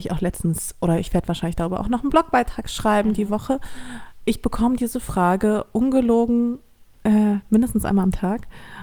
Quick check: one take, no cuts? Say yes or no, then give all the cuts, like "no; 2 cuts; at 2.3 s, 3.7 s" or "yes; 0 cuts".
yes; 0 cuts